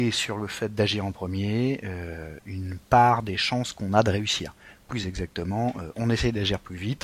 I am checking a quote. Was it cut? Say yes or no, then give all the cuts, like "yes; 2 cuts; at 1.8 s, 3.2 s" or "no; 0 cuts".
no; 0 cuts